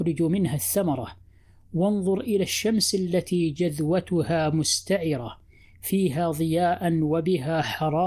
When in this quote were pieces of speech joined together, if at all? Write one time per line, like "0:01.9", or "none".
none